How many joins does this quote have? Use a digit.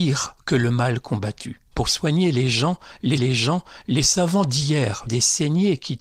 3